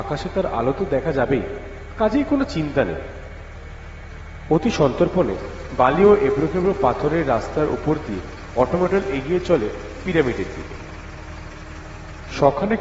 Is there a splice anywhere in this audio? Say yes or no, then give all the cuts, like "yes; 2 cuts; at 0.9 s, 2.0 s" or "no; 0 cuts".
no; 0 cuts